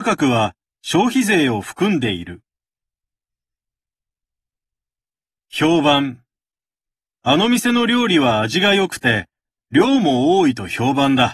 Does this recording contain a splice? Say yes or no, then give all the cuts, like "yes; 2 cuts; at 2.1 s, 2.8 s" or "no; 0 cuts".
no; 0 cuts